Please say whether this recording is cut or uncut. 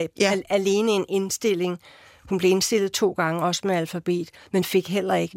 uncut